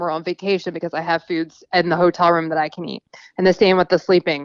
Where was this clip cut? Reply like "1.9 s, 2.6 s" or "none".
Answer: none